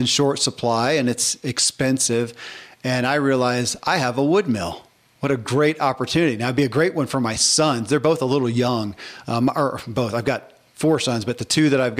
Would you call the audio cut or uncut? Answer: uncut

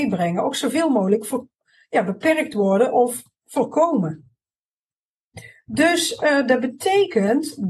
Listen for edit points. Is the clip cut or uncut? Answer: uncut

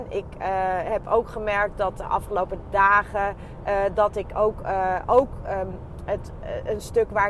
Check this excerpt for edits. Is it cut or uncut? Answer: uncut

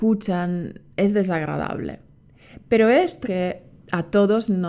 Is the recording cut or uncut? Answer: cut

